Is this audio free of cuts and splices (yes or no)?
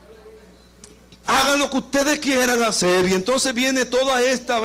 yes